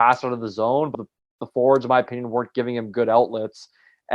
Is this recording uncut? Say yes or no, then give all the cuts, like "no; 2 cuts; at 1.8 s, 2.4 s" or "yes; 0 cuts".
no; 1 cut; at 0.9 s